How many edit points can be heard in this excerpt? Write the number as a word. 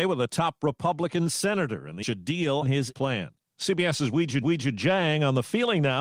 four